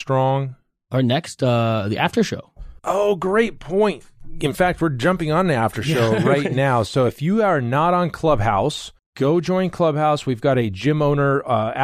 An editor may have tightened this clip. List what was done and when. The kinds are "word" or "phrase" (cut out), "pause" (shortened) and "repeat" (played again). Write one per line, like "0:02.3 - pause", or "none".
0:02.8 - pause
0:09.0 - pause